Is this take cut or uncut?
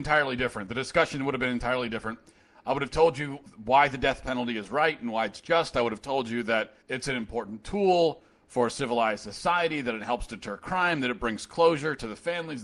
cut